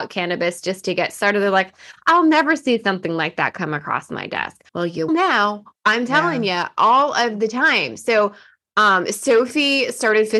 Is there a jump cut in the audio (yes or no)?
yes